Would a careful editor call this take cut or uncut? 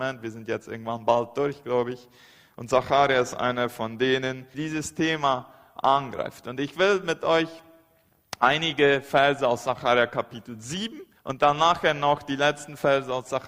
cut